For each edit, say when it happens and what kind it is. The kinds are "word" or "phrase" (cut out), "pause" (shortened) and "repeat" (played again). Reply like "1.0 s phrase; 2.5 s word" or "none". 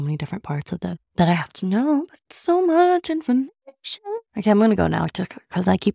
1.1 s pause; 4.3 s pause